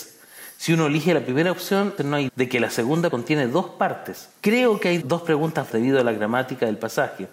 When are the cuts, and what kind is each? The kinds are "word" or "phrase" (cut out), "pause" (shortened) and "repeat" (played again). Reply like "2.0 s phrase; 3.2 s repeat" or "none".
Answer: 2.0 s word; 2.3 s word; 3.1 s word; 5.0 s word; 5.7 s word

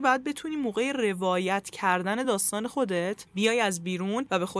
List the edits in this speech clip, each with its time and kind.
none

